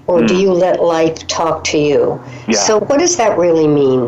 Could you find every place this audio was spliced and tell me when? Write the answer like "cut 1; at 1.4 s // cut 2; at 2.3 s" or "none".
cut 1; at 2.8 s